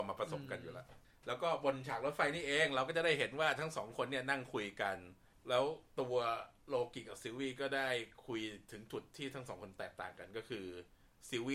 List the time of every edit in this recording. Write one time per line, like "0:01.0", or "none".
0:05.9